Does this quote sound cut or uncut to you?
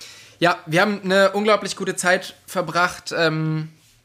uncut